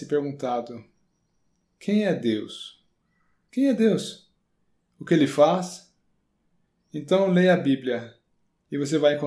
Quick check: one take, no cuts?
yes; 0 cuts

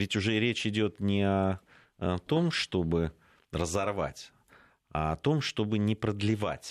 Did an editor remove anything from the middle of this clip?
no; 0 cuts

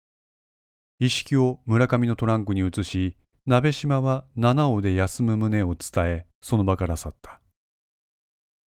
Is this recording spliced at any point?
no; 0 cuts

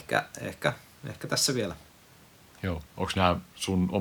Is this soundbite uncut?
no; 1 cut; at 2.9 s

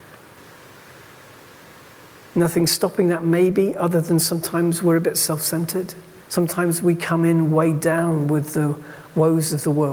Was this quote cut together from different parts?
yes; 1 cut; at 6.2 s

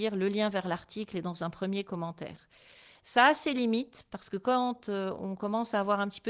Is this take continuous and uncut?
yes; 0 cuts

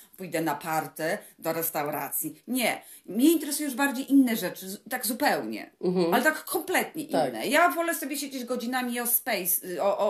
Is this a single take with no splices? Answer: yes; 0 cuts

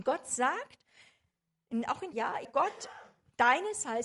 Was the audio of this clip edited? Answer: yes; 2 cuts; at 2.1 s, 2.4 s

